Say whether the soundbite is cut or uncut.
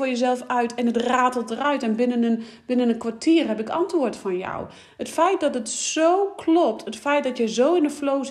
uncut